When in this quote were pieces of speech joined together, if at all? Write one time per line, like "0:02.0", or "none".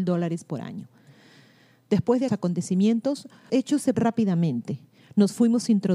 0:02.3
0:03.5
0:03.9